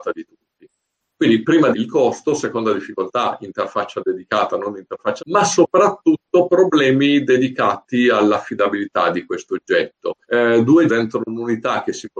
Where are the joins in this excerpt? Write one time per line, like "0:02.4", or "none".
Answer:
0:01.7
0:05.2
0:10.2
0:10.9